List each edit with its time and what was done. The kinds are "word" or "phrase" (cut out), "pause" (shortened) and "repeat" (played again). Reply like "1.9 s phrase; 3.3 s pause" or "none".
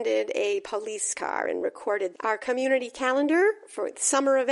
2.1 s word